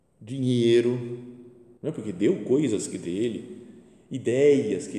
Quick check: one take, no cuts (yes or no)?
no